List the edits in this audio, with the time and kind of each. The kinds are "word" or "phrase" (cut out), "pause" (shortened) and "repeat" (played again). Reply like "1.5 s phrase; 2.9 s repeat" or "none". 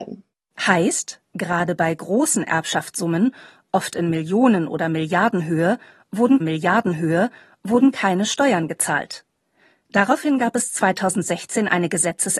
1.2 s pause; 6.4 s repeat